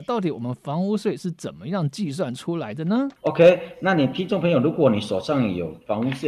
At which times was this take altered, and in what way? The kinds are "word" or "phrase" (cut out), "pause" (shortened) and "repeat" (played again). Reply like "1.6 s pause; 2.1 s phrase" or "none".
3.2 s pause